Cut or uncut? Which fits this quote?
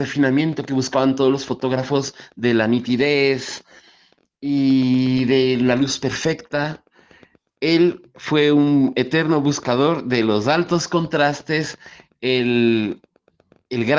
uncut